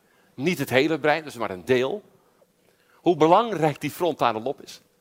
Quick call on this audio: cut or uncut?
uncut